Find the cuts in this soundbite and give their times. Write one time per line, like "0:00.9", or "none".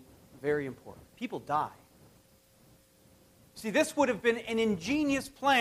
0:01.1